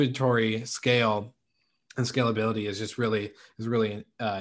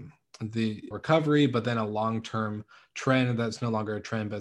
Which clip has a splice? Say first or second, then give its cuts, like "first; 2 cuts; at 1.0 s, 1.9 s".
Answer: second; 1 cut; at 0.9 s